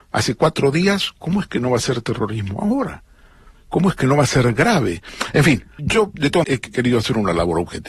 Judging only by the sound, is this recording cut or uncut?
cut